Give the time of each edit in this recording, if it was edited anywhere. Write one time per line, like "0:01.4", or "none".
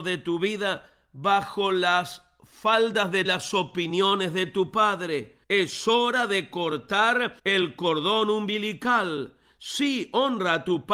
0:03.3
0:05.4
0:07.4